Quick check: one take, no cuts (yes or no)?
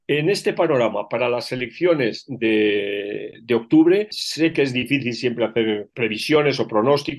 yes